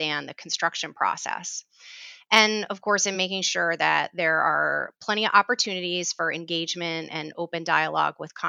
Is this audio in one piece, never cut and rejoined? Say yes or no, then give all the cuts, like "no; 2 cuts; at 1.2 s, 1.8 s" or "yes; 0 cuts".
yes; 0 cuts